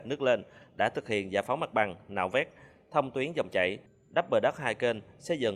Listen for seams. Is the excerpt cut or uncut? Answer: uncut